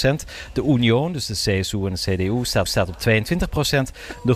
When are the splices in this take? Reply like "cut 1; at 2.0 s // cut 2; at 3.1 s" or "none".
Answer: cut 1; at 2.7 s